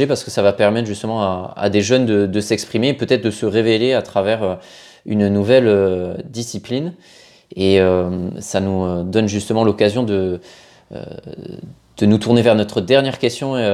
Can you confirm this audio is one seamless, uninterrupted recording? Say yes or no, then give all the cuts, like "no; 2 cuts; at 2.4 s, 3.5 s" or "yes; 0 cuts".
yes; 0 cuts